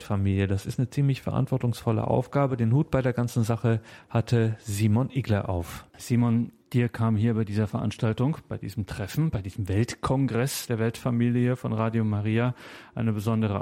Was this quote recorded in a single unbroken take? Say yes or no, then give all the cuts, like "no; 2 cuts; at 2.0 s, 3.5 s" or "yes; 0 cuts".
no; 1 cut; at 5.9 s